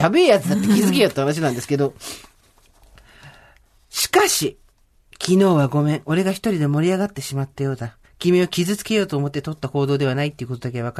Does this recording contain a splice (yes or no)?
yes